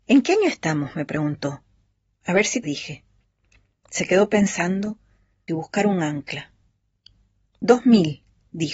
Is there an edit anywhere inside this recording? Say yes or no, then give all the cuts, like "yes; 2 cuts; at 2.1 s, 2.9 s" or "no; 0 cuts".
yes; 2 cuts; at 2.6 s, 5.5 s